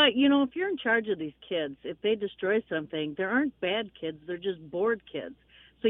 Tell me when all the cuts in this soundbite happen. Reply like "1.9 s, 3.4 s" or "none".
none